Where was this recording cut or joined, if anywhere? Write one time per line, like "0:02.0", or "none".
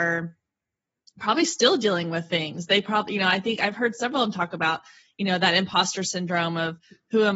none